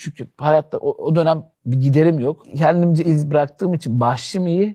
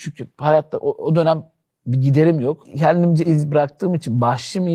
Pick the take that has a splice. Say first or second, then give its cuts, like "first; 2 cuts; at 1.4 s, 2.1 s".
first; 1 cut; at 1.5 s